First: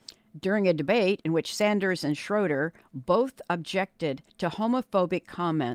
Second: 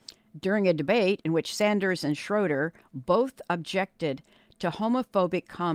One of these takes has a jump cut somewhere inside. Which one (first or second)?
first